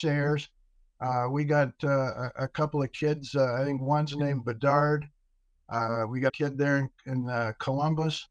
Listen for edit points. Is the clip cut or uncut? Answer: cut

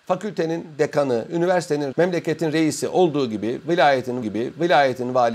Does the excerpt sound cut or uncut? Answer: cut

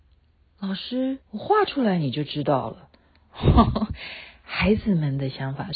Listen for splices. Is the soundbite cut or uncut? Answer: cut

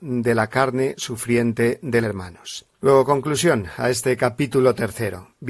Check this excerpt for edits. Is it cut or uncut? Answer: cut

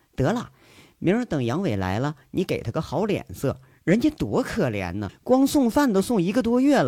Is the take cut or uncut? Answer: cut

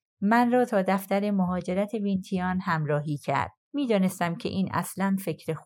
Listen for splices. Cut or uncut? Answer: cut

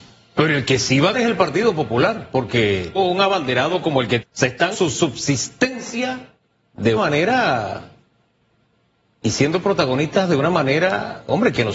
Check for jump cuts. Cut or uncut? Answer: cut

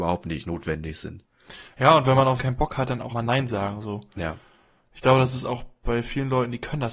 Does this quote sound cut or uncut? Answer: cut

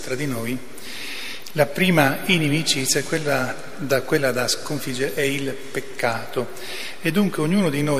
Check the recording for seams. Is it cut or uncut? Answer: uncut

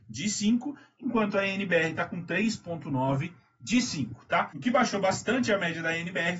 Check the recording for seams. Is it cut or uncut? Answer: uncut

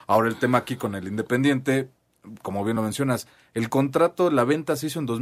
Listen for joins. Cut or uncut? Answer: uncut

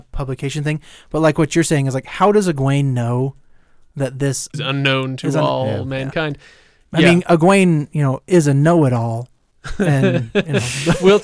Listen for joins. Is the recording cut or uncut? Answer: cut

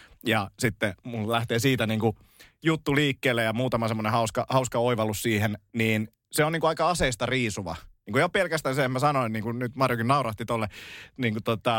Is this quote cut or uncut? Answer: uncut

